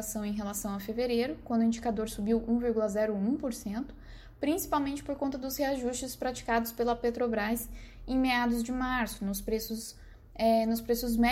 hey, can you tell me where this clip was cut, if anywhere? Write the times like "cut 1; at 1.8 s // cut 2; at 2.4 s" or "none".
none